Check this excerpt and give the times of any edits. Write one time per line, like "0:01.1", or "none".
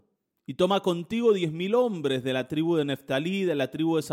none